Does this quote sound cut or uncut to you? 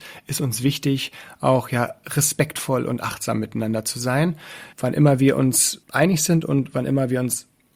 cut